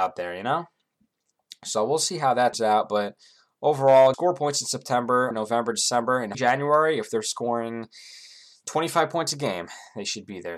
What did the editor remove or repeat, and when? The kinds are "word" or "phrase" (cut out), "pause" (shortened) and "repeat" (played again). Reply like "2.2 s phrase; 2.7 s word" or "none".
2.5 s word; 4.1 s word; 5.3 s word; 6.3 s word